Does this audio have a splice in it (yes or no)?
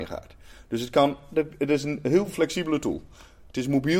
no